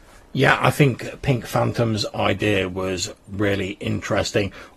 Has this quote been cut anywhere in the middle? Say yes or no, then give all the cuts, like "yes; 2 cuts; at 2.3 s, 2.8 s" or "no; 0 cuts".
no; 0 cuts